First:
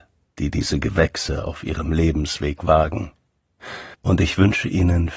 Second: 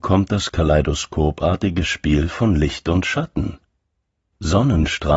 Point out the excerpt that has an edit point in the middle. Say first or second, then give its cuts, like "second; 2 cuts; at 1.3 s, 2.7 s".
first; 1 cut; at 3.9 s